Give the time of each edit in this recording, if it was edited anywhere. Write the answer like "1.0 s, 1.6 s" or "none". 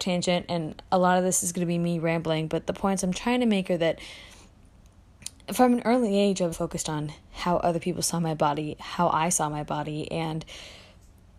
6.5 s